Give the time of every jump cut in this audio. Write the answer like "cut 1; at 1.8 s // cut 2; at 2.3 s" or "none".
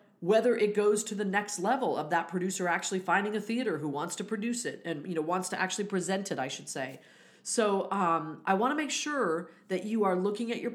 none